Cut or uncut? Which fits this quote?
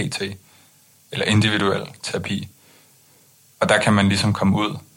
uncut